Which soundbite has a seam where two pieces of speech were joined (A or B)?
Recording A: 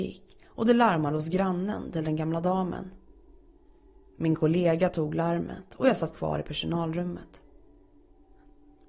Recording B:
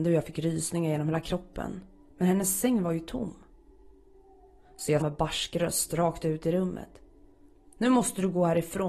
B